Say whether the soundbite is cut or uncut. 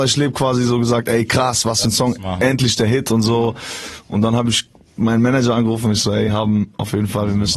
uncut